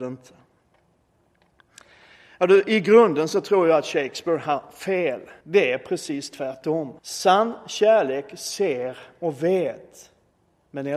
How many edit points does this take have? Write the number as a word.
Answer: two